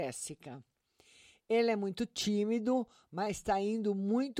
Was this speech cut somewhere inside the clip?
no; 0 cuts

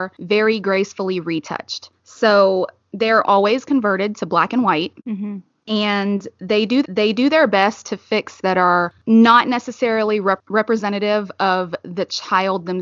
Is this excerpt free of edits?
no; 4 cuts; at 3.2 s, 5.0 s, 6.8 s, 8.4 s

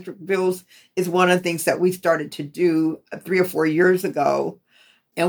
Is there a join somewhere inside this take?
no; 0 cuts

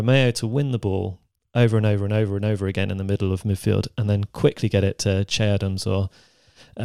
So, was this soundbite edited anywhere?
no; 0 cuts

